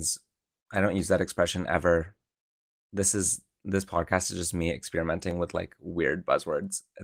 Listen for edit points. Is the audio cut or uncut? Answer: uncut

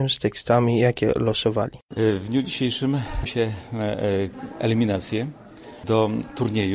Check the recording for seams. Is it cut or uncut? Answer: cut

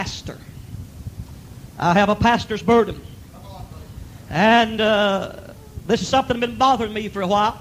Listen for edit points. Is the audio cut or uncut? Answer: uncut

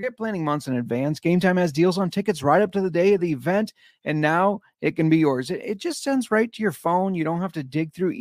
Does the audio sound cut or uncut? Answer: uncut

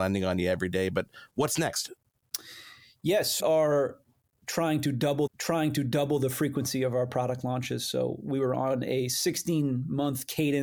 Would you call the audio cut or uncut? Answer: cut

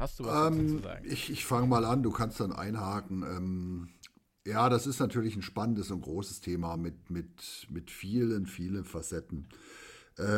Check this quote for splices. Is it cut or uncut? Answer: uncut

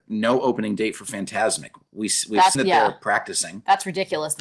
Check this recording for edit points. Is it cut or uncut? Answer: cut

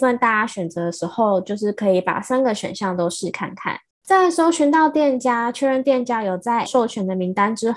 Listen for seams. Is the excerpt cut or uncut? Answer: cut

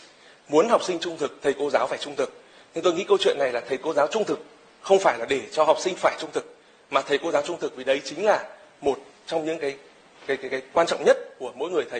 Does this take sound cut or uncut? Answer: uncut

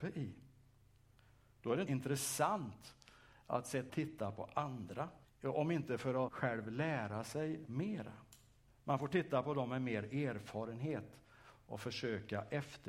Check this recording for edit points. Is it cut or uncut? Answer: cut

